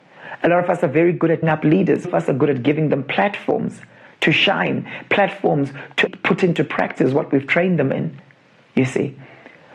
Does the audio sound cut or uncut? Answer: cut